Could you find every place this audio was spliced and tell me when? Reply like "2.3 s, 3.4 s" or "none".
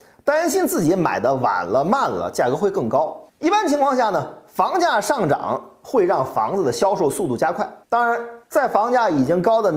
3.3 s, 7.8 s, 8.4 s